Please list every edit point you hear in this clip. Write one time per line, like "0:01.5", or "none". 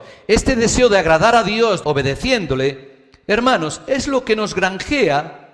0:01.8